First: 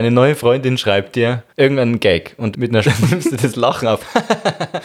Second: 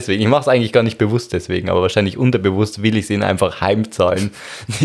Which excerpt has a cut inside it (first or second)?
first